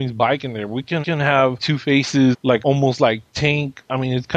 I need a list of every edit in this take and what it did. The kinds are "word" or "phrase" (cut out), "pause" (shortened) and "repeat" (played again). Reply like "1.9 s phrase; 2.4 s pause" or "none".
1.0 s repeat; 2.6 s word